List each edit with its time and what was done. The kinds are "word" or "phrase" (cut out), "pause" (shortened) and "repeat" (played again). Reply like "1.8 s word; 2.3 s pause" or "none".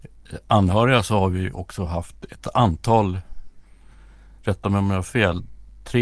none